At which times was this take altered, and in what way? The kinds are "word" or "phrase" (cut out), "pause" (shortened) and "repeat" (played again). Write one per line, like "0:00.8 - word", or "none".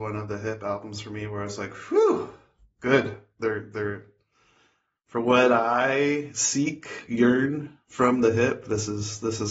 none